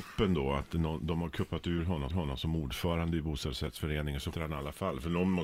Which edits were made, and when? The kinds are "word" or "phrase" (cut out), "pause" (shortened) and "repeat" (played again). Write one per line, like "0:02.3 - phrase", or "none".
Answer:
0:02.1 - repeat
0:04.3 - word